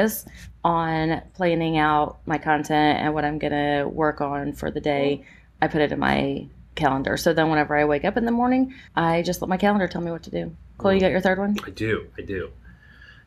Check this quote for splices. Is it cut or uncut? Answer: cut